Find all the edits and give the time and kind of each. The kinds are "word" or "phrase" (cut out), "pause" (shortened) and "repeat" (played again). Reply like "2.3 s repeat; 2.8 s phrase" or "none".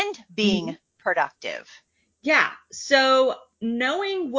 1.9 s pause